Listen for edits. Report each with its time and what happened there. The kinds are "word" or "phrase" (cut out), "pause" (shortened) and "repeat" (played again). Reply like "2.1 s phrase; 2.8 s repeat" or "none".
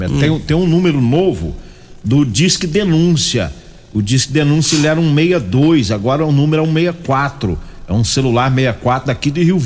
none